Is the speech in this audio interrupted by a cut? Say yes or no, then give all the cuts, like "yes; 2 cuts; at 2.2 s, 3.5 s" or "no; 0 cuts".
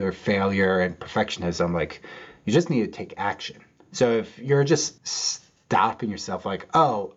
yes; 1 cut; at 5.0 s